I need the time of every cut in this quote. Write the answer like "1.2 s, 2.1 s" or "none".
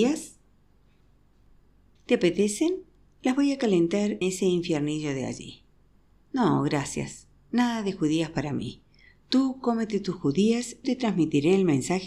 4.2 s, 10.8 s